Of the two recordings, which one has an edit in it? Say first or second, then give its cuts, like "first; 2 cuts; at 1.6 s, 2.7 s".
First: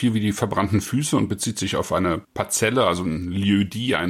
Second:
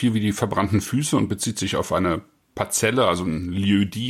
first; 1 cut; at 2.2 s